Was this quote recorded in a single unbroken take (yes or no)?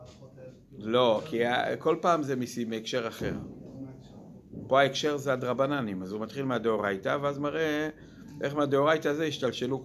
yes